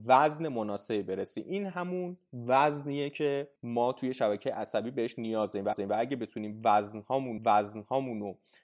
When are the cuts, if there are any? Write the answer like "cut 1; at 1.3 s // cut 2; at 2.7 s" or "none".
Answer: cut 1; at 3.6 s // cut 2; at 5.7 s // cut 3; at 7.4 s